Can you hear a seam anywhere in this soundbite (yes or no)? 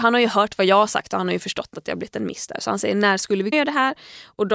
yes